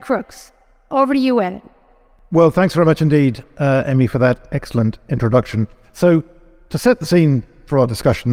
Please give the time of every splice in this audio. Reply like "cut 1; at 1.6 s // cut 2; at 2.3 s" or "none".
none